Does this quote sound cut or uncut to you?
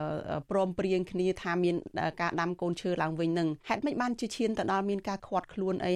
cut